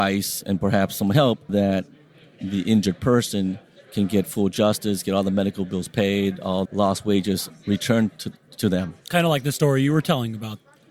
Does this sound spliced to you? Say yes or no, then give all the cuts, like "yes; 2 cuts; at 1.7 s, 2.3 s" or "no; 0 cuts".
yes; 3 cuts; at 1.5 s, 6.6 s, 7.5 s